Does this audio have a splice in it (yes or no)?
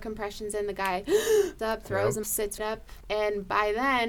yes